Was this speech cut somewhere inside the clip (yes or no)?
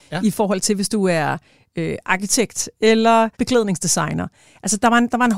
yes